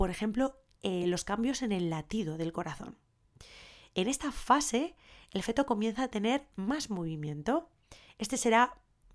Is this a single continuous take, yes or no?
yes